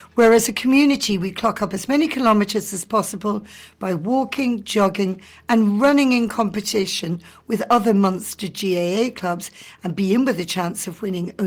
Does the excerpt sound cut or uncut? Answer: uncut